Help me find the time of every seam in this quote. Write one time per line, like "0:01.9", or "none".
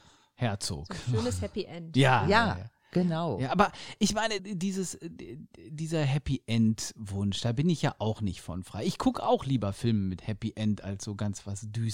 0:04.4